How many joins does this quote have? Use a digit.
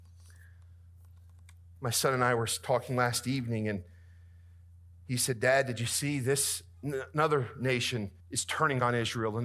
1